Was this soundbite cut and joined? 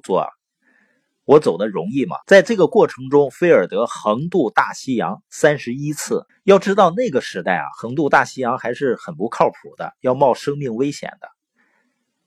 yes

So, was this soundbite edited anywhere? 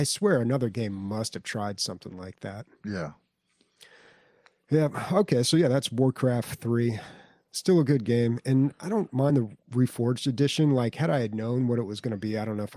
no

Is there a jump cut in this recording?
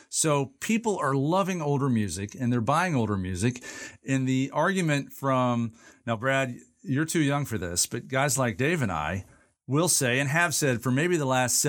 no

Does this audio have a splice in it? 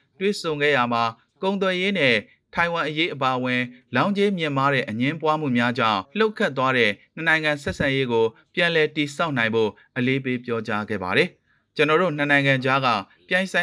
yes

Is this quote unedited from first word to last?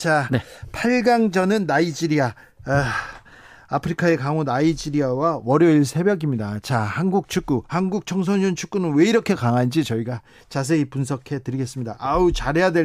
yes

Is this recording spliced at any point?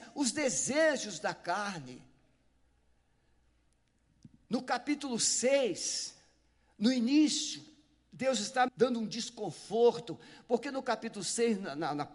yes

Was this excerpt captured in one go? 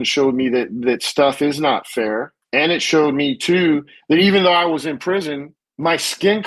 yes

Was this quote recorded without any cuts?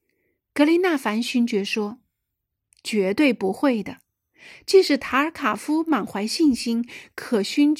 yes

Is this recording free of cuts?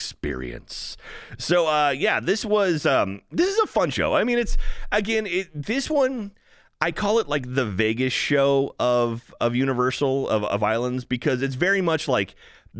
yes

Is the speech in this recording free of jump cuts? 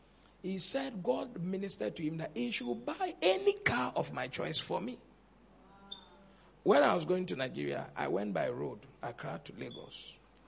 yes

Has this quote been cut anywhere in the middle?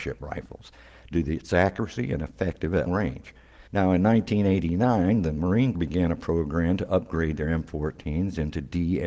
yes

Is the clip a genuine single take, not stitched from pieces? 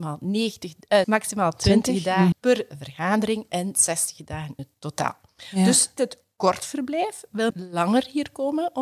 no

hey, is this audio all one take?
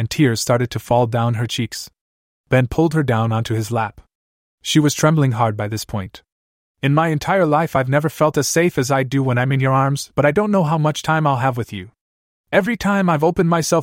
yes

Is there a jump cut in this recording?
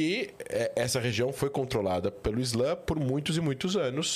no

